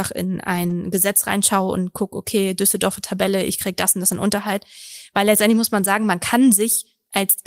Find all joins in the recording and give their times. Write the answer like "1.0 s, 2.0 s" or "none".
none